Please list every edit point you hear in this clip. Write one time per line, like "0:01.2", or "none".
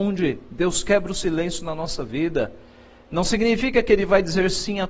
none